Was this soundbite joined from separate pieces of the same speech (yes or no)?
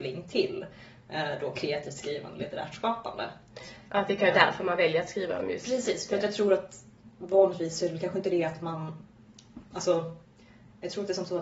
no